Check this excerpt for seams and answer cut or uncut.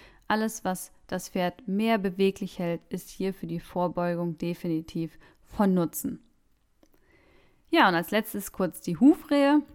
uncut